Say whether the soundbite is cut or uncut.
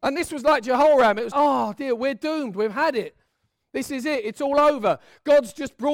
cut